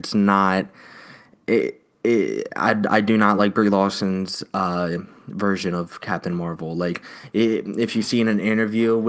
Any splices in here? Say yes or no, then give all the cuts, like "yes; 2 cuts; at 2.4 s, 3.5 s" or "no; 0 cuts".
no; 0 cuts